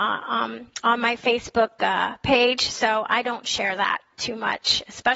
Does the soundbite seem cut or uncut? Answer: uncut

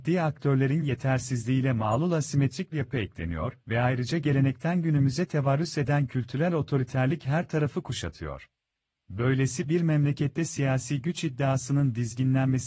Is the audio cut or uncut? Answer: cut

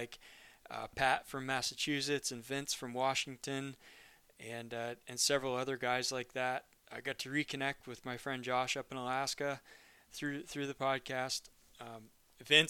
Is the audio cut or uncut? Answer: uncut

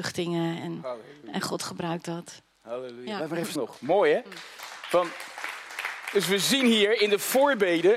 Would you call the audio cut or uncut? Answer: cut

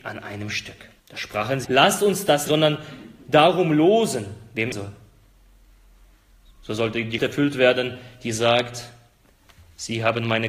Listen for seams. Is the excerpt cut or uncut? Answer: cut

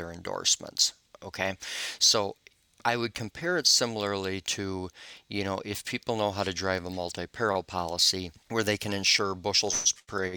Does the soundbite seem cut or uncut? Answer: uncut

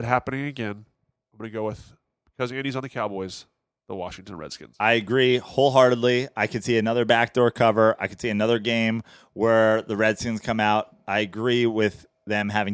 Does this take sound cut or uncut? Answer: uncut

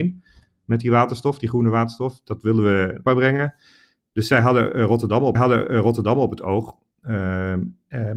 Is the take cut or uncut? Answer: cut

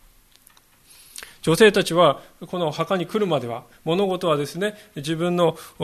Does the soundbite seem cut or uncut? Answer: uncut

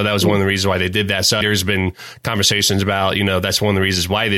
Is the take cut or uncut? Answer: cut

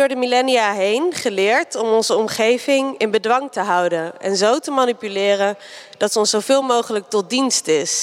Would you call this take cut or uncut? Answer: uncut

